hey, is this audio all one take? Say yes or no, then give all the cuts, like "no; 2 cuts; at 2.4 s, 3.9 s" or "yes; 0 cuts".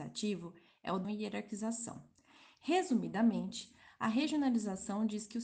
no; 1 cut; at 1.0 s